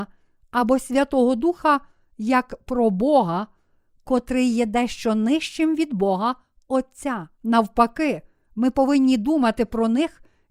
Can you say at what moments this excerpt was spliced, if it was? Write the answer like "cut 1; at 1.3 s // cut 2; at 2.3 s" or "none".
cut 1; at 7.3 s